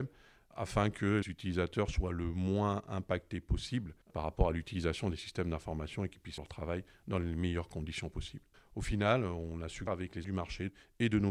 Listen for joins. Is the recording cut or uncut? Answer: cut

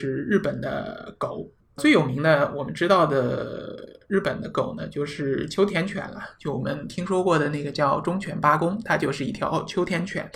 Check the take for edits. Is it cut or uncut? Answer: uncut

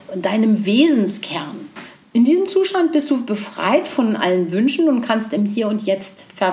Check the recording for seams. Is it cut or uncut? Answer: uncut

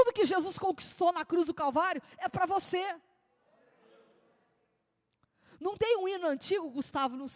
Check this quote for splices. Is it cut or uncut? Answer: uncut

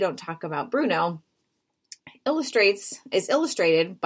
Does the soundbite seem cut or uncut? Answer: cut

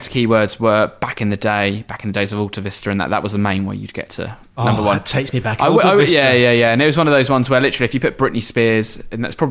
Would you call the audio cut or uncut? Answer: uncut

